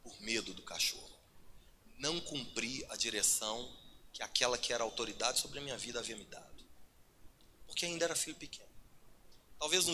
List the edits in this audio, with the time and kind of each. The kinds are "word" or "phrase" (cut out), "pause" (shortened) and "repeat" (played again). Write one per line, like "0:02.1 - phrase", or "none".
none